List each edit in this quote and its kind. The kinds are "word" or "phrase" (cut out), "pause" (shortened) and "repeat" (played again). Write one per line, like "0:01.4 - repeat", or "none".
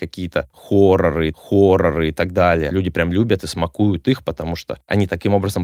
0:01.3 - repeat